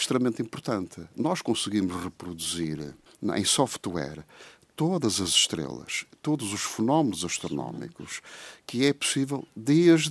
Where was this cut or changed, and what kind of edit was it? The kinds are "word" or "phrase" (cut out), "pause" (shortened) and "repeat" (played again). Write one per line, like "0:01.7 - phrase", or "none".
none

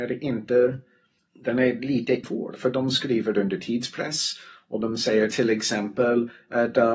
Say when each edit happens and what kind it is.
0:01.2 - pause
0:02.2 - phrase

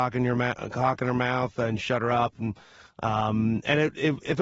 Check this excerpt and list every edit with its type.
none

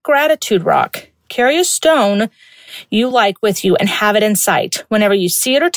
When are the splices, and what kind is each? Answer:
none

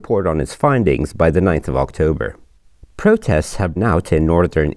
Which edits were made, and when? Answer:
0:03.8 - word

